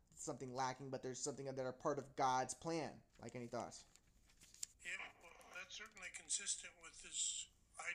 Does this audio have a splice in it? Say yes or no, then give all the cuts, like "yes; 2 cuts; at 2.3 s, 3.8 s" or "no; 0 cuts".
yes; 2 cuts; at 3.1 s, 4.7 s